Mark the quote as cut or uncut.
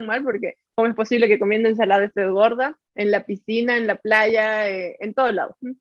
cut